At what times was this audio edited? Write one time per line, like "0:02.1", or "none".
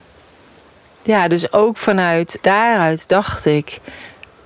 0:02.4